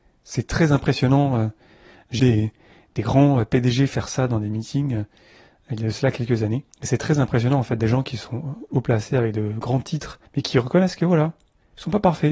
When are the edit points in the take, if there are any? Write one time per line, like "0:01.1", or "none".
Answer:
0:02.2
0:06.7
0:07.8
0:10.2